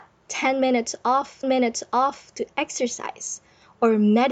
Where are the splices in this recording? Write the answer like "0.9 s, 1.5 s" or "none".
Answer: 1.4 s